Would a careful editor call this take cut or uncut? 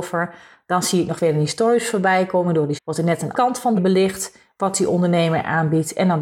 cut